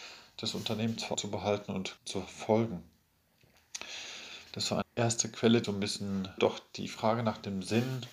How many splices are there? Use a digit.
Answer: 5